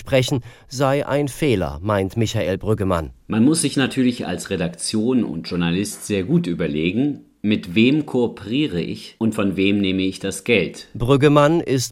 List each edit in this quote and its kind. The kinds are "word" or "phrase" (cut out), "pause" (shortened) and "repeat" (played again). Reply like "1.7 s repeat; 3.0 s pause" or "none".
none